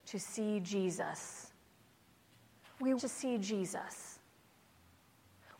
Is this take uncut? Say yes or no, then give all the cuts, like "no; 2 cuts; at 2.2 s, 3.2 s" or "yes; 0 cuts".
no; 1 cut; at 3.0 s